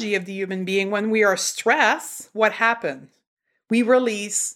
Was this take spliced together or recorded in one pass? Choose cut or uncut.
uncut